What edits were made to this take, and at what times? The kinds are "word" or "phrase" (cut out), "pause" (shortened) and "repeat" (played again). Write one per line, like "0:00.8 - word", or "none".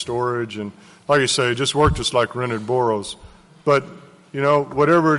none